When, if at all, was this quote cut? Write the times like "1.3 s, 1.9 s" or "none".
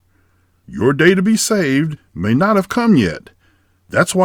none